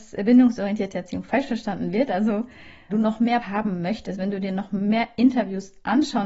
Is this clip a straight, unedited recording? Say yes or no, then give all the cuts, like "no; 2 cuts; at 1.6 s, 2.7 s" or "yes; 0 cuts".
no; 2 cuts; at 2.9 s, 3.4 s